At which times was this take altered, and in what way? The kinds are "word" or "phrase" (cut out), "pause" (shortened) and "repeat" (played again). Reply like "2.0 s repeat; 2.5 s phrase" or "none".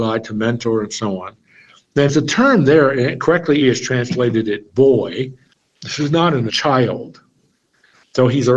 2.1 s phrase; 3.6 s word; 5.5 s pause; 6.5 s phrase